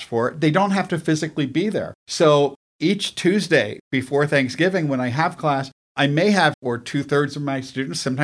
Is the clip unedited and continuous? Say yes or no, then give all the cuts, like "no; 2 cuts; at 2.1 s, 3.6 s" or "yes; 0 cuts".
no; 2 cuts; at 2.0 s, 6.5 s